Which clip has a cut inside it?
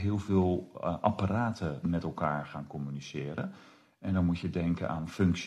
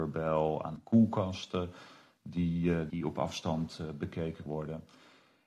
second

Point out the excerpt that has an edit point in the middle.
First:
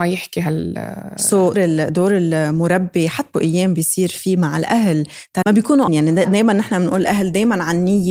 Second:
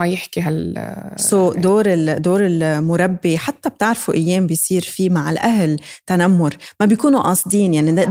first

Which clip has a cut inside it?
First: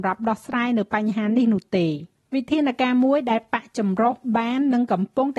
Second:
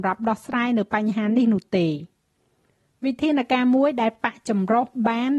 first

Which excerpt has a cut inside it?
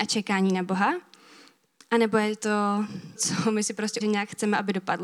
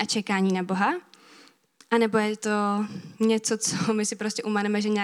first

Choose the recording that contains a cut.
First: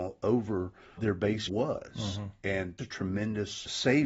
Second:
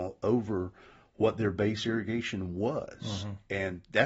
first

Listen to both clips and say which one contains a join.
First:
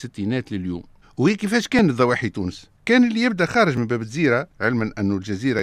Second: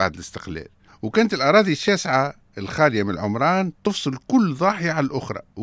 first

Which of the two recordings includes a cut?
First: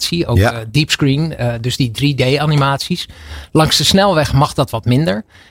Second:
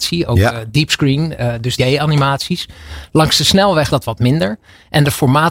second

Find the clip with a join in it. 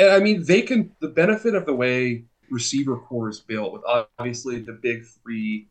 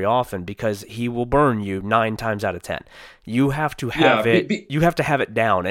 first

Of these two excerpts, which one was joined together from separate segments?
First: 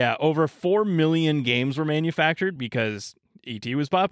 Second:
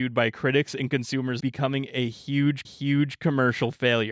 second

